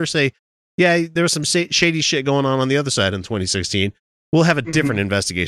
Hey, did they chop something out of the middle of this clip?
no; 0 cuts

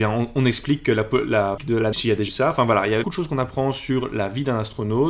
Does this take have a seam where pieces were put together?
yes; 4 cuts; at 1.6 s, 1.9 s, 2.3 s, 3.0 s

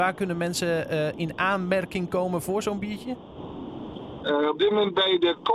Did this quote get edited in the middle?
no; 0 cuts

